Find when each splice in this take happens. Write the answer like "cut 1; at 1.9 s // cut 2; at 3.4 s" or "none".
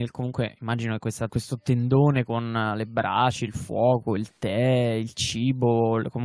cut 1; at 1.3 s